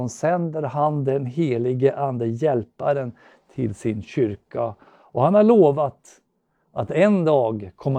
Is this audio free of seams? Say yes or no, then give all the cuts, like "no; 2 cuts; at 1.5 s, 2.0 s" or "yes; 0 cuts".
yes; 0 cuts